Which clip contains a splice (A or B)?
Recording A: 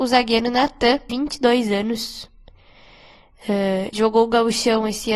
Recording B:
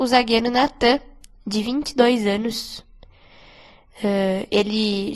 A